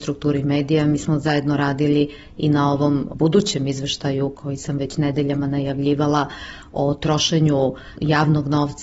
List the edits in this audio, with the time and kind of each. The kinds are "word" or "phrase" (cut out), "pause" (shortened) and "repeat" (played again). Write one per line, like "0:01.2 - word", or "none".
none